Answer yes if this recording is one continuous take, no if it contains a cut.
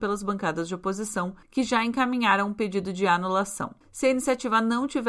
no